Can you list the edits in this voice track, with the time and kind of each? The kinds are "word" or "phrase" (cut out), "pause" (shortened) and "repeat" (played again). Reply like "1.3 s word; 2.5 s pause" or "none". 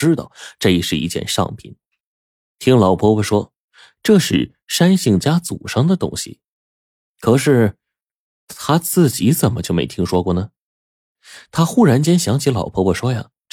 none